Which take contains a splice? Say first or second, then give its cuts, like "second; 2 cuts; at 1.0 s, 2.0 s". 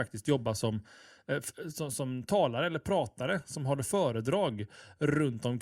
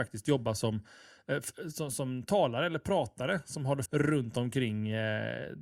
second; 1 cut; at 3.9 s